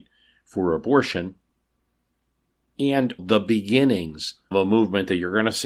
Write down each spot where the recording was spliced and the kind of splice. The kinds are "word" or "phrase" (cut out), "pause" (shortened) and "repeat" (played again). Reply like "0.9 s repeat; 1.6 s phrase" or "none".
3.2 s word; 4.5 s word